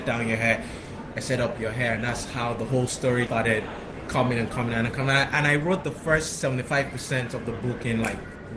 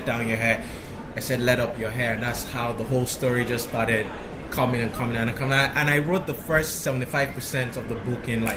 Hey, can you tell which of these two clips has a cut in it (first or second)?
first